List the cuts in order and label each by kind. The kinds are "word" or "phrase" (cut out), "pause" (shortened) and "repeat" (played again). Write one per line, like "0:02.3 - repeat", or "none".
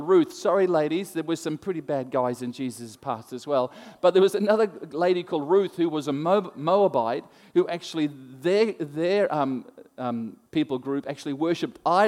0:10.5 - pause